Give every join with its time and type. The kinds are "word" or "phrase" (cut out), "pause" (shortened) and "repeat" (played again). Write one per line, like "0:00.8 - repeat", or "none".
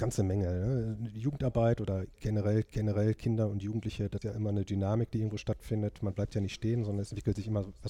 0:02.6 - repeat
0:04.2 - word